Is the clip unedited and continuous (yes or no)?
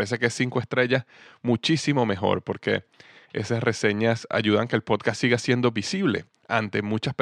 yes